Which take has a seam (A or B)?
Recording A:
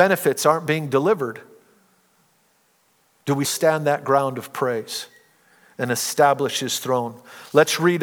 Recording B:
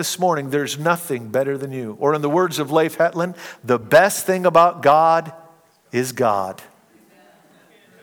A